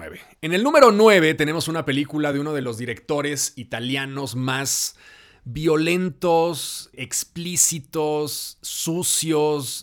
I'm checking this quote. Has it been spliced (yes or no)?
no